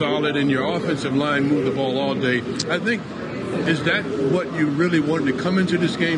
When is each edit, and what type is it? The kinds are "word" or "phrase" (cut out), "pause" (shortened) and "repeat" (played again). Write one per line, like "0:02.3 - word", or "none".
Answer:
none